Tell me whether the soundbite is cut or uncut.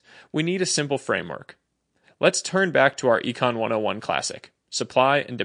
uncut